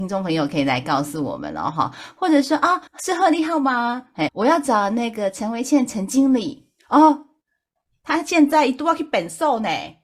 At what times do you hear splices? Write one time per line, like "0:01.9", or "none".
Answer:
0:02.9
0:04.3
0:06.8